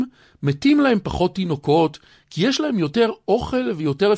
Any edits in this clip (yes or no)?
no